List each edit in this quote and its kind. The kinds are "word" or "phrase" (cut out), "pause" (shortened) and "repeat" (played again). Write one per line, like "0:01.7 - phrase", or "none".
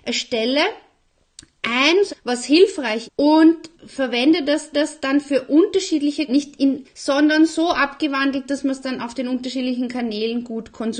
0:02.1 - phrase
0:03.1 - word
0:03.7 - word
0:04.7 - repeat
0:06.3 - word
0:06.8 - phrase